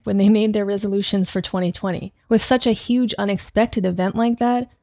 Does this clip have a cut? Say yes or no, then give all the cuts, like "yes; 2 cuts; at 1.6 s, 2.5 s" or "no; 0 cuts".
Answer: yes; 1 cut; at 2.2 s